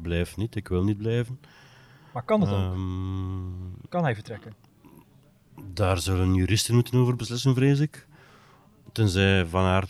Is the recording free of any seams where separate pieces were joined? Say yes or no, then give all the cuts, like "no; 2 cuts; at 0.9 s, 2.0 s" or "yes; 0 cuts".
yes; 0 cuts